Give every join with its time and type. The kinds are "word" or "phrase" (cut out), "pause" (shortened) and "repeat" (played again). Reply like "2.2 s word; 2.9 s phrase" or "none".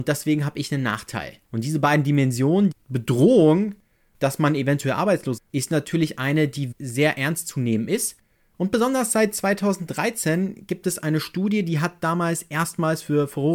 1.4 s pause; 2.7 s phrase; 5.4 s phrase; 6.7 s word

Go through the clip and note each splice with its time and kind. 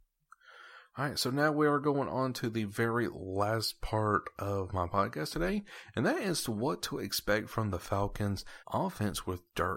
8.6 s pause

